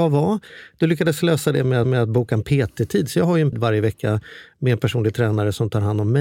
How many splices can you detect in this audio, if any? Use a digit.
2